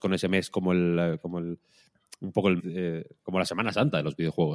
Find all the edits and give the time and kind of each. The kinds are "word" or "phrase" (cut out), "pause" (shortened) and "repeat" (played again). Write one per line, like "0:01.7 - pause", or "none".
0:02.6 - word